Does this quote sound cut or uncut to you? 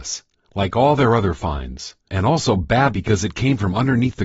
cut